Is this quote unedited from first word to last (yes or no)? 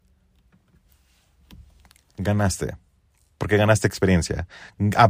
yes